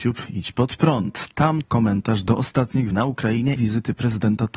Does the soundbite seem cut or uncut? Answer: cut